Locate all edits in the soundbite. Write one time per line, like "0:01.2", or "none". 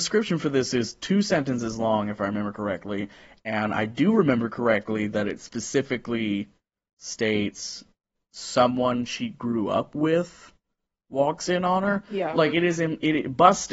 none

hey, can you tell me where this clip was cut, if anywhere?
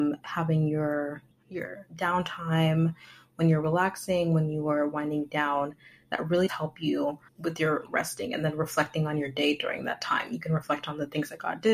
0:01.3
0:06.5
0:07.3
0:07.9

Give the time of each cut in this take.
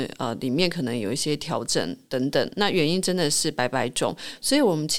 0:01.4

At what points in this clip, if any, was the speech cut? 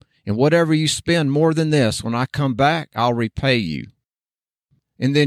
none

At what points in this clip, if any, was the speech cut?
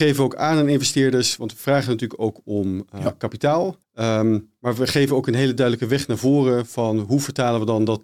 0:03.8

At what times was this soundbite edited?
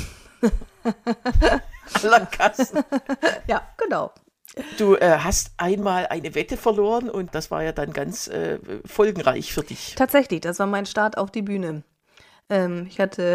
none

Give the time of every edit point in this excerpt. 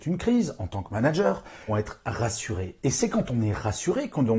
0:01.7

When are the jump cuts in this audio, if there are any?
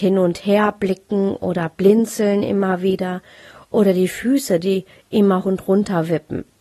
0:05.4

